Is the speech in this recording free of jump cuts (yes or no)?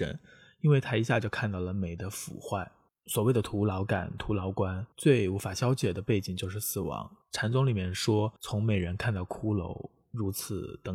no